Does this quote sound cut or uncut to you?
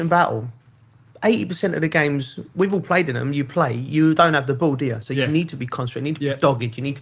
uncut